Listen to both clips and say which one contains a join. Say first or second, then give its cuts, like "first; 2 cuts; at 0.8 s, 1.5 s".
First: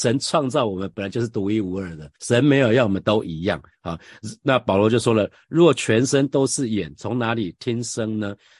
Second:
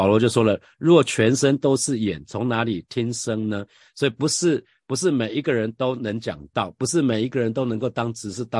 first; 1 cut; at 2.2 s